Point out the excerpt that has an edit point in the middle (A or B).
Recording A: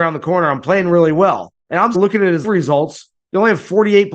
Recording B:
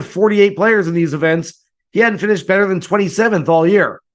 A